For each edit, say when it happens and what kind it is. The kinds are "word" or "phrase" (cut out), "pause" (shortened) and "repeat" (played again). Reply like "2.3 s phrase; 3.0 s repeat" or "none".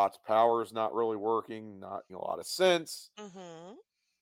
2.1 s word